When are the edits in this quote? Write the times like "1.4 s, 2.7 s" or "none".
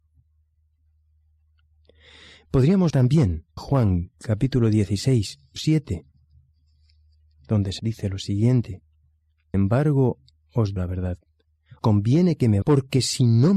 2.9 s, 3.6 s, 5.6 s, 7.8 s, 9.5 s, 10.8 s, 11.8 s, 12.6 s